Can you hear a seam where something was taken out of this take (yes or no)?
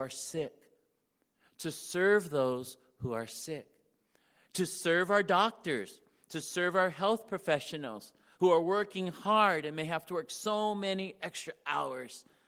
no